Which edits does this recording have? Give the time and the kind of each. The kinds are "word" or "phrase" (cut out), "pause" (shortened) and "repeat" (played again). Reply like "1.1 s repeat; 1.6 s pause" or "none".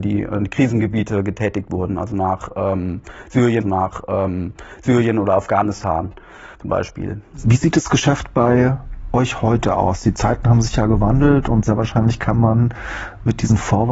3.6 s repeat; 6.5 s pause